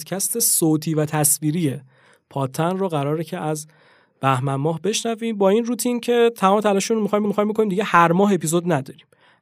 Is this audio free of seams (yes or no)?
no